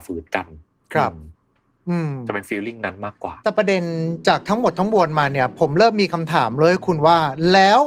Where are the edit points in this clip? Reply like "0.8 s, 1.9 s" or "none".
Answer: 3.4 s